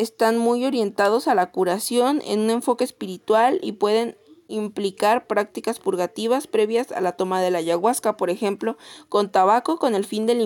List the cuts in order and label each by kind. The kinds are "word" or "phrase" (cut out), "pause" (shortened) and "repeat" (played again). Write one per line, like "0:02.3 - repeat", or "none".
none